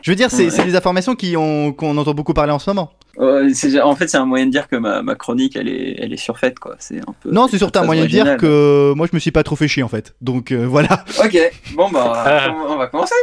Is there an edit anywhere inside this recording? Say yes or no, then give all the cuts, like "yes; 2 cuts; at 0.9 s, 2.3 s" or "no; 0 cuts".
no; 0 cuts